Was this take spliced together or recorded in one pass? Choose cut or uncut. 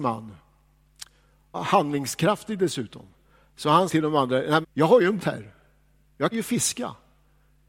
cut